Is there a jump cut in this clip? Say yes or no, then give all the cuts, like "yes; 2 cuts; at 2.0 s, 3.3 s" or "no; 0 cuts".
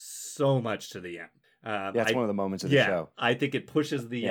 yes; 1 cut; at 1.4 s